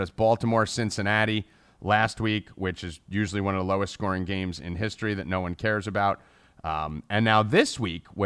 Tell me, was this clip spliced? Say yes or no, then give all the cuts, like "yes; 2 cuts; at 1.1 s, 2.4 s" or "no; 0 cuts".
no; 0 cuts